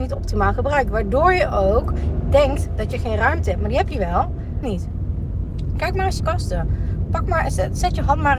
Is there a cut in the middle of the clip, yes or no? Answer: yes